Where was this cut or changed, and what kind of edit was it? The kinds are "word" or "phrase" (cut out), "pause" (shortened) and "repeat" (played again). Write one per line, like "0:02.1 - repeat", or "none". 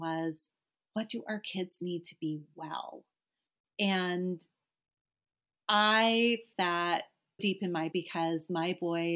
0:06.5 - word
0:07.4 - word
0:07.9 - word